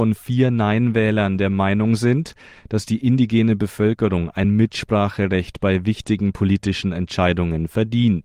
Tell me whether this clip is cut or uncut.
uncut